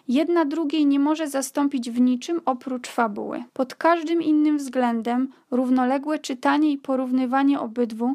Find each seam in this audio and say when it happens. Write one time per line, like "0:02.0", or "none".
0:03.5